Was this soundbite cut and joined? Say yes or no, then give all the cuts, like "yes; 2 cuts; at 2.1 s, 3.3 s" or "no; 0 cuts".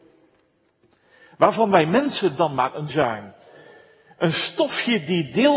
yes; 1 cut; at 2.9 s